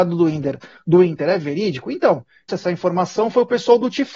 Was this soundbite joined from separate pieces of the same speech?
yes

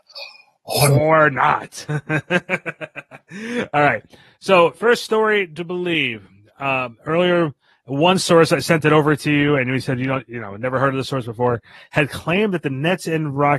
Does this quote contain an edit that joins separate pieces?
no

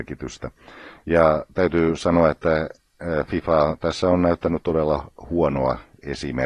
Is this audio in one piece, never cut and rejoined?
yes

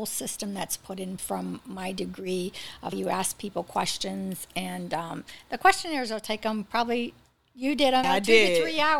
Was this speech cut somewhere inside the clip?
yes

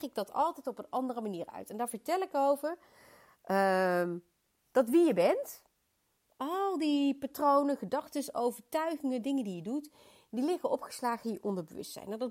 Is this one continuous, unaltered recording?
yes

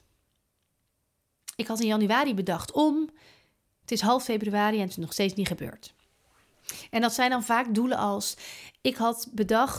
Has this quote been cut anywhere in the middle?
no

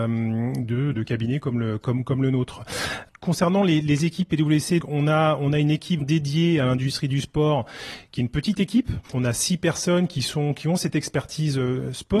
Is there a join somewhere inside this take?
yes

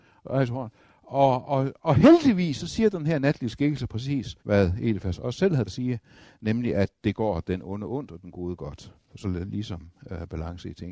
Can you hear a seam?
yes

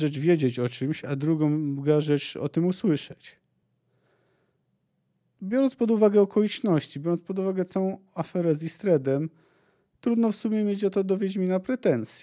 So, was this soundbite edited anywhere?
no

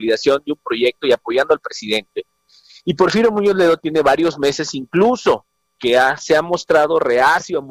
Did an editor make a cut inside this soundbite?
no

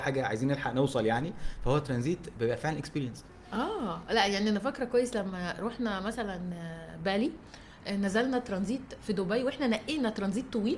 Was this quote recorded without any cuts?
yes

